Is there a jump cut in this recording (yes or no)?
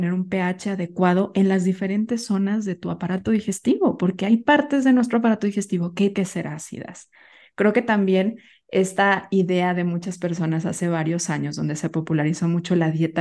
yes